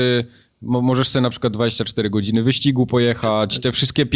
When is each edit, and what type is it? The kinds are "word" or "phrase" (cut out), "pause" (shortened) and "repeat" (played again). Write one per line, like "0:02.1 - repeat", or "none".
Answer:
none